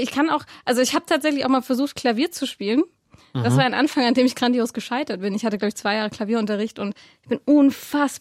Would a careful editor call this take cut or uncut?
uncut